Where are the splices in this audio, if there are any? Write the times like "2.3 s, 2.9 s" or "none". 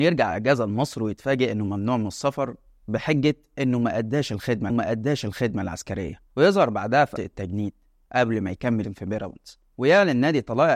4.7 s, 7.2 s, 8.8 s